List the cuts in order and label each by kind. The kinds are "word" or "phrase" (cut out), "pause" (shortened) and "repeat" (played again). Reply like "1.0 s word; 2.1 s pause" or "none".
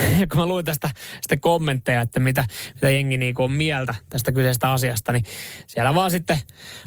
none